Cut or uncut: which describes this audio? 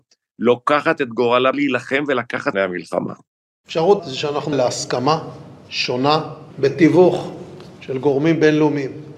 cut